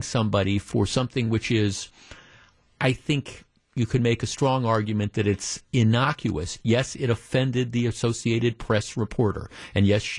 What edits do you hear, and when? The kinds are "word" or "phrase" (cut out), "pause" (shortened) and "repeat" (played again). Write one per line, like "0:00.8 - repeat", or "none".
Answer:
none